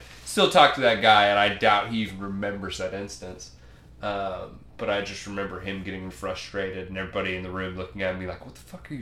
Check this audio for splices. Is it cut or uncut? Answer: cut